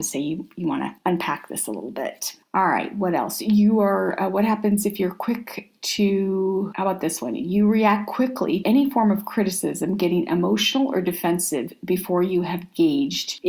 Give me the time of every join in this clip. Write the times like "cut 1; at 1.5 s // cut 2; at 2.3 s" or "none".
cut 1; at 8.6 s